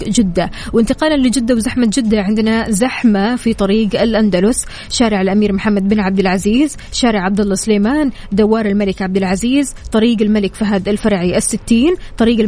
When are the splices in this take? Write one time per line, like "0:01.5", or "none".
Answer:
none